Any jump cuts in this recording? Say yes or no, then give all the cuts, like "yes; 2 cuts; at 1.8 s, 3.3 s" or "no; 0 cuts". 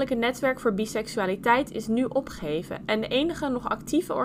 no; 0 cuts